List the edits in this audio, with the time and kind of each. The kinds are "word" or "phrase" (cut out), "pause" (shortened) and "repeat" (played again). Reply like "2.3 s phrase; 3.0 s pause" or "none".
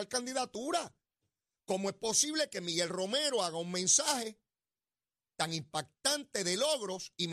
none